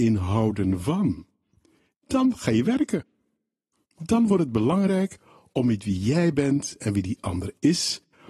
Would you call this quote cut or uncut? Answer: uncut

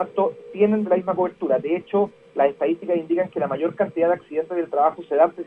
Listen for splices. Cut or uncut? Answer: uncut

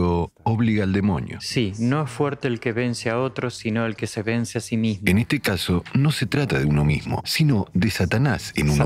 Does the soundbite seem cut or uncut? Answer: uncut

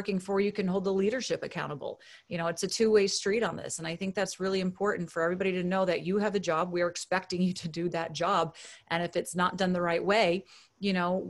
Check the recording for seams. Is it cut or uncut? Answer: uncut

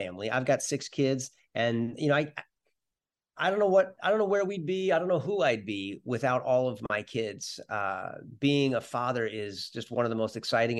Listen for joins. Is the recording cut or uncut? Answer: uncut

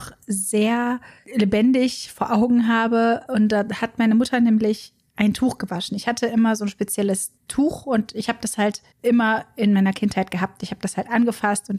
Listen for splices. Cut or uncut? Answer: cut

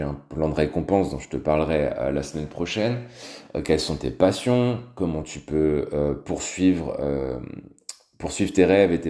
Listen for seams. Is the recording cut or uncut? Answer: uncut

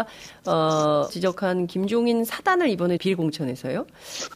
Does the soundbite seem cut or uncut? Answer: cut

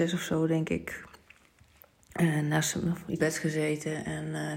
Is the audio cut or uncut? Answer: cut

